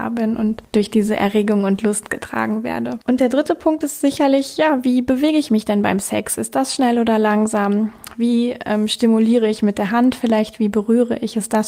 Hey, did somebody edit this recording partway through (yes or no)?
no